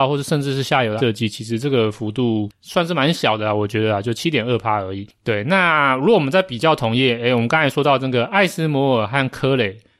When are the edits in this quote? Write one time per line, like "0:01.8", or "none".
0:01.0